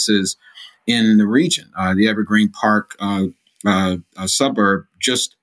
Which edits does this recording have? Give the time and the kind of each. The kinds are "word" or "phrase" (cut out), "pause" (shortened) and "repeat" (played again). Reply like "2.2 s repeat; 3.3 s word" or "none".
none